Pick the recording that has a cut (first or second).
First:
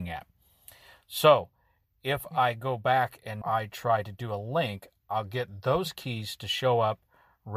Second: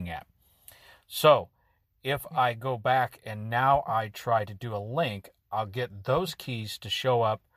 first